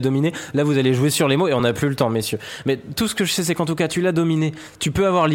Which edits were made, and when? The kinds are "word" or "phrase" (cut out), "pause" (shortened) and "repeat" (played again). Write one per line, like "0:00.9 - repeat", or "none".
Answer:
none